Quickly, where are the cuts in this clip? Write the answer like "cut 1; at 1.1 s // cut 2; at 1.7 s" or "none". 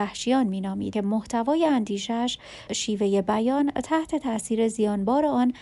cut 1; at 0.9 s // cut 2; at 2.7 s